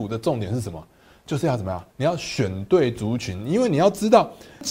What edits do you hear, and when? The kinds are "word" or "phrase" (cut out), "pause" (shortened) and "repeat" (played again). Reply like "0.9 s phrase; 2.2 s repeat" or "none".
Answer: 1.9 s pause